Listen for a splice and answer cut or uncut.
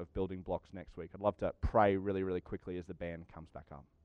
uncut